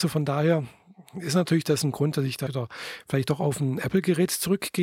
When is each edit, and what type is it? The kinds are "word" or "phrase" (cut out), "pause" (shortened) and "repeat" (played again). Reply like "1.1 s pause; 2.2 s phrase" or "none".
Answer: 2.5 s word